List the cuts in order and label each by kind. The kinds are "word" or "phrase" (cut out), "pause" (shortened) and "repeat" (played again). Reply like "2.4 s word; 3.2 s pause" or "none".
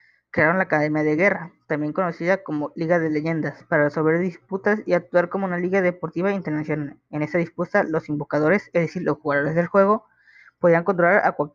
none